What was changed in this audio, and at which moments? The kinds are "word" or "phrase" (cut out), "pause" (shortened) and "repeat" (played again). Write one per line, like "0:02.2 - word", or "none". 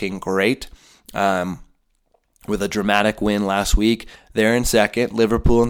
none